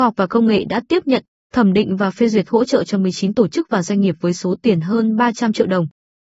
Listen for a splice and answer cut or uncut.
uncut